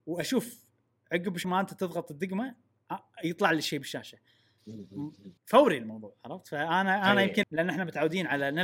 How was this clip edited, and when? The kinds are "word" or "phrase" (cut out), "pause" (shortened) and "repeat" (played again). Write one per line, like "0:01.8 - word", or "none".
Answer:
0:01.4 - word
0:05.4 - pause
0:07.4 - word